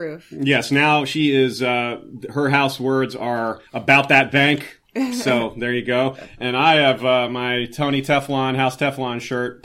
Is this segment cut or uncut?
cut